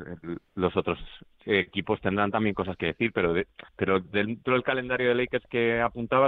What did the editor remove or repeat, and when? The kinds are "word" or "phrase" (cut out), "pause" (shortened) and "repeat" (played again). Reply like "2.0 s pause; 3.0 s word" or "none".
3.7 s pause